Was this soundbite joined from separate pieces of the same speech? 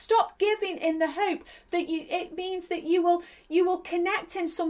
no; 0 cuts

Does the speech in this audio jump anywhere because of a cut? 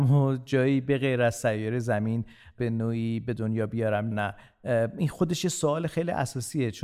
yes; 1 cut; at 4.1 s

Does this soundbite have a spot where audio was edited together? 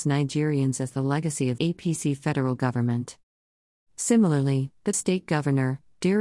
yes; 2 cuts; at 1.6 s, 4.9 s

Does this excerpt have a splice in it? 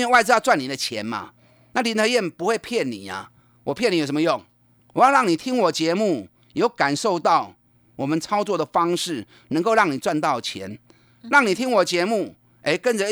no; 0 cuts

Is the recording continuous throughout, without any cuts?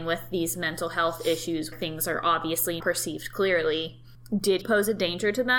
no; 3 cuts; at 1.7 s, 2.8 s, 4.6 s

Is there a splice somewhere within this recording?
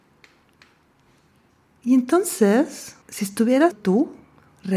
yes; 2 cuts; at 3.0 s, 3.7 s

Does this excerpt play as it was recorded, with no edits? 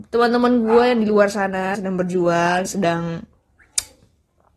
no; 2 cuts; at 1.7 s, 2.7 s

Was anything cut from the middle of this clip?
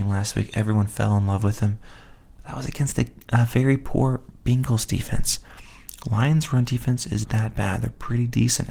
yes; 1 cut; at 7.2 s

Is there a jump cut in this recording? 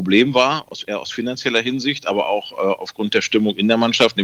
no; 0 cuts

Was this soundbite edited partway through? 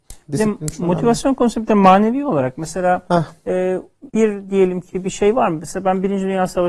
yes; 1 cut; at 4.1 s

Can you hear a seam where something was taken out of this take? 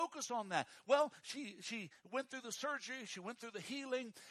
no; 0 cuts

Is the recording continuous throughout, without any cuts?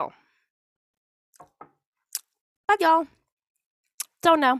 no; 1 cut; at 2.8 s

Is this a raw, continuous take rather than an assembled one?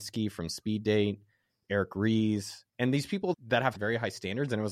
no; 1 cut; at 2.7 s

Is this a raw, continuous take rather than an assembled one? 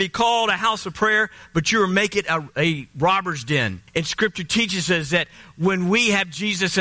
no; 1 cut; at 3.9 s

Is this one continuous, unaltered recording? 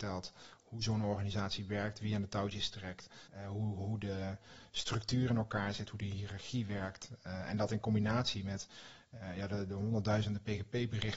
no; 1 cut; at 3.3 s

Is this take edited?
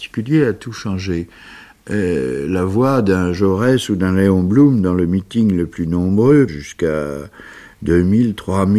yes; 1 cut; at 6.5 s

